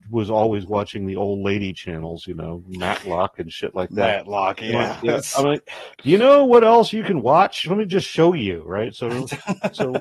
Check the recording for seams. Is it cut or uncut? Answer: cut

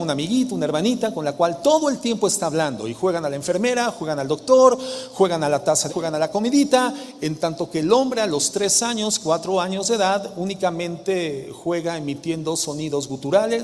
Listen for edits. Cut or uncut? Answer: cut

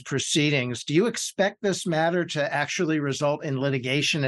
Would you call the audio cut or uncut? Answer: uncut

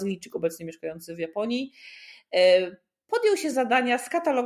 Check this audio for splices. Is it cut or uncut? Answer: uncut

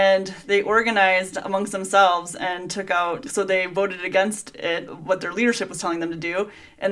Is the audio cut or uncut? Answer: cut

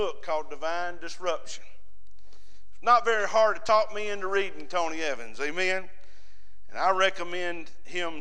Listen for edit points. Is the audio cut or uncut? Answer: uncut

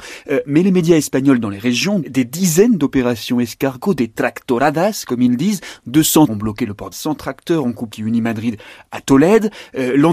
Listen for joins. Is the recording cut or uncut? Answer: cut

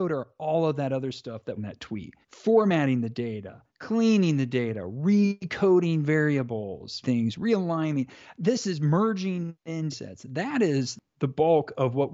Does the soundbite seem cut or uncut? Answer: cut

